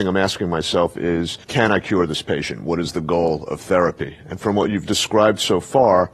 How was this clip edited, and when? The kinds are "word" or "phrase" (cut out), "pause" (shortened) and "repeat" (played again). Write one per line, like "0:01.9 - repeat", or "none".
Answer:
0:01.4 - pause